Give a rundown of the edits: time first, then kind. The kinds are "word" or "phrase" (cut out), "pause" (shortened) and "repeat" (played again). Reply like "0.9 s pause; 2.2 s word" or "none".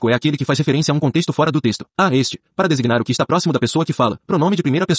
1.9 s pause